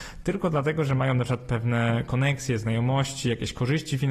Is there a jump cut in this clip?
no; 0 cuts

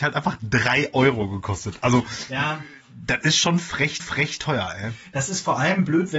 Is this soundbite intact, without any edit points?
no; 1 cut; at 4.0 s

